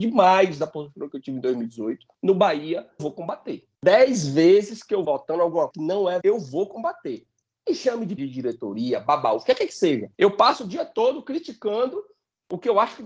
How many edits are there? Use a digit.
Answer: 8